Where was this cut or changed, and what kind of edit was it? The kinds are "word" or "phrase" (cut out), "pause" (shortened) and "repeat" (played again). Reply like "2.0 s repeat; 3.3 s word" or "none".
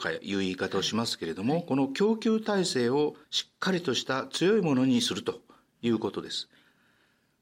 3.2 s pause